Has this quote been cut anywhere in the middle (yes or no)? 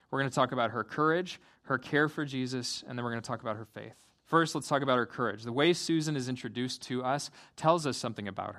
yes